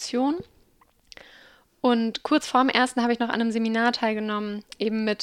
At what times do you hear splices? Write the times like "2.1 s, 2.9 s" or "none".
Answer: none